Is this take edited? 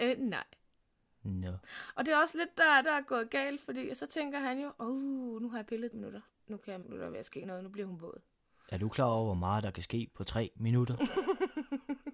yes; 3 cuts; at 2.8 s, 5.9 s, 6.8 s

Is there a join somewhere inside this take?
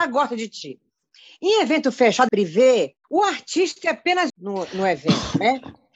yes; 3 cuts; at 2.3 s, 3.0 s, 4.3 s

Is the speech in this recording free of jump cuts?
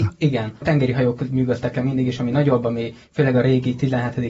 yes; 0 cuts

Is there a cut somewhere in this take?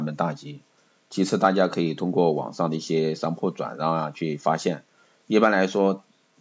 no; 0 cuts

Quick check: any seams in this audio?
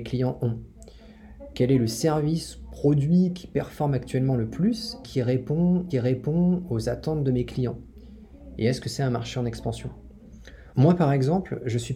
yes; 2 cuts; at 5.0 s, 5.9 s

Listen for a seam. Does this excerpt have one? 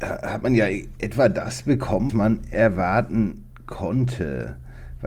yes; 1 cut; at 2.1 s

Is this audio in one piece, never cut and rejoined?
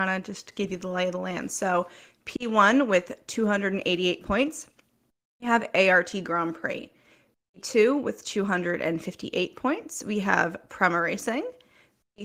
yes; 0 cuts

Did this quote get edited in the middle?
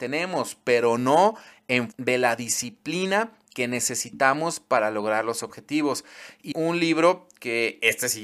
yes; 2 cuts; at 1.9 s, 6.5 s

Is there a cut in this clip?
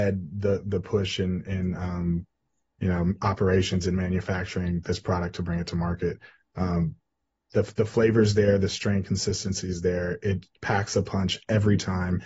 no; 0 cuts

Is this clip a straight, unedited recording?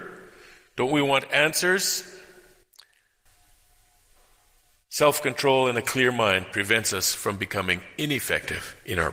yes; 0 cuts

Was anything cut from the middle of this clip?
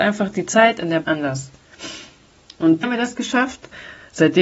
yes; 2 cuts; at 1.0 s, 2.8 s

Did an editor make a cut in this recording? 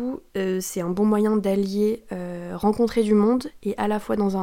no; 0 cuts

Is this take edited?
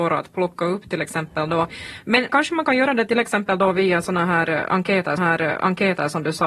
yes; 2 cuts; at 2.3 s, 5.2 s

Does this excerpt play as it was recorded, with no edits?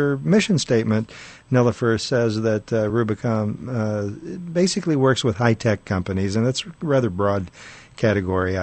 yes; 0 cuts

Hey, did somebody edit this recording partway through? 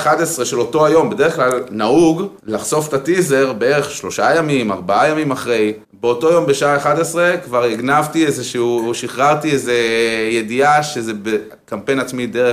yes; 2 cuts; at 2.4 s, 5.8 s

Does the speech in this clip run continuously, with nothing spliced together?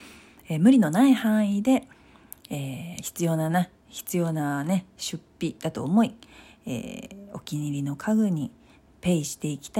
yes; 0 cuts

